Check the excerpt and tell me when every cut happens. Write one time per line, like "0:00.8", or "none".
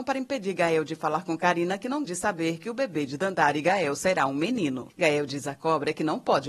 0:02.1